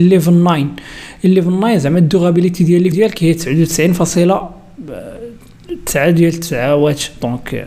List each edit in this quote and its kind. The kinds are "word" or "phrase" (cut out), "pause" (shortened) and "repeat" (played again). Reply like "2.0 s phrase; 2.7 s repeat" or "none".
2.9 s word